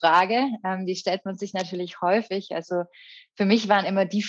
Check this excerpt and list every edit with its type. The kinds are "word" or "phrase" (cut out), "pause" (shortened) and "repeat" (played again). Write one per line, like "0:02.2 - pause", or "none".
none